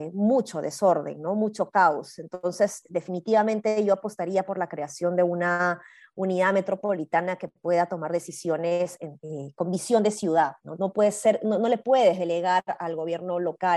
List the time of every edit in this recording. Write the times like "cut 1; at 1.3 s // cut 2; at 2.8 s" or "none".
none